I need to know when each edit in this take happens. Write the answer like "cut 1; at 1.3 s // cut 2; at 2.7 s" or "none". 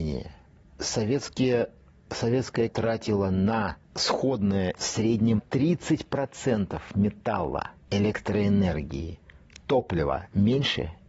cut 1; at 2.7 s // cut 2; at 4.8 s // cut 3; at 5.4 s

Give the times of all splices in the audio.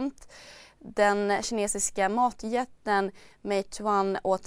none

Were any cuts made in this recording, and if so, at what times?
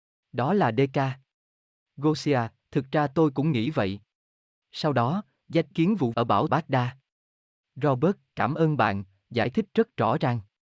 cut 1; at 2.6 s // cut 2; at 5.7 s // cut 3; at 6.1 s // cut 4; at 6.5 s

